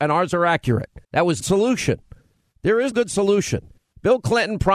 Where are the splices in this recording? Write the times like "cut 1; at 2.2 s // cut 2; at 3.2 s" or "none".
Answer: cut 1; at 1.0 s // cut 2; at 1.4 s // cut 3; at 2.9 s // cut 4; at 3.8 s